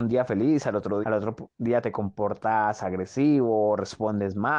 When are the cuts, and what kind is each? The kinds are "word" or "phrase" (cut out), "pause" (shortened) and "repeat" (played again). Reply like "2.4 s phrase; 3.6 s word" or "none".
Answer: 1.0 s phrase; 1.5 s pause